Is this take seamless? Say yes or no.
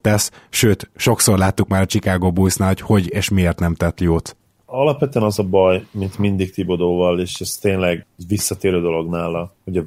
yes